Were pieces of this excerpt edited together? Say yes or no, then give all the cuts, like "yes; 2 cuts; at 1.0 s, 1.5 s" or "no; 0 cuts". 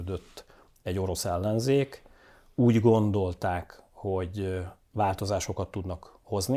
no; 0 cuts